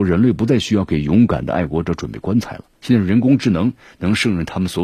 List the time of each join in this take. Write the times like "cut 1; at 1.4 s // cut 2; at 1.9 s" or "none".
cut 1; at 2.7 s